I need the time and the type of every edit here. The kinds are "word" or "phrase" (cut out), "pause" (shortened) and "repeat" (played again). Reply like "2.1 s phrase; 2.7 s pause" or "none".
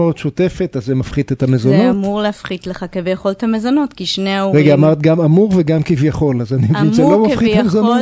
none